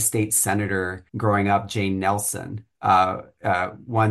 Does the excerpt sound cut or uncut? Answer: cut